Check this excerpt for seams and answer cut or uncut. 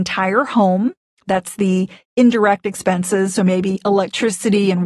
uncut